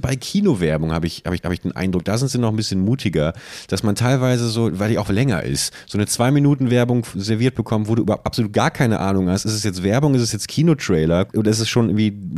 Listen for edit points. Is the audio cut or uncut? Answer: cut